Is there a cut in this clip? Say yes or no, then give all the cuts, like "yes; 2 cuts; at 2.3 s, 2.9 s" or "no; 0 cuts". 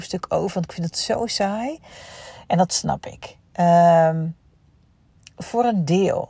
no; 0 cuts